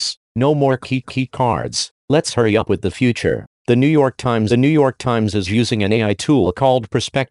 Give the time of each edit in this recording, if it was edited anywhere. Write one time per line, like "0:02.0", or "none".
0:01.0
0:04.5